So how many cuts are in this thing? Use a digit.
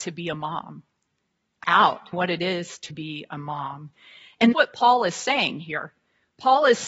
4